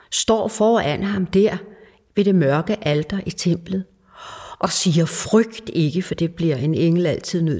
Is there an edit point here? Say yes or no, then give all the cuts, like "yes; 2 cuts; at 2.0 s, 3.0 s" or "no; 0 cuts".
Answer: no; 0 cuts